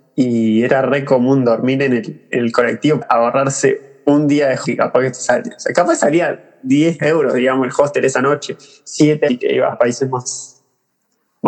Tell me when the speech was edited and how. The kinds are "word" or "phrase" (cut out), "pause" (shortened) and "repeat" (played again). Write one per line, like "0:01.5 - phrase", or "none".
0:03.0 - word
0:04.6 - word
0:09.3 - word
0:09.7 - word